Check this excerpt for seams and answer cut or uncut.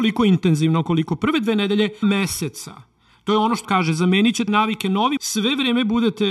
cut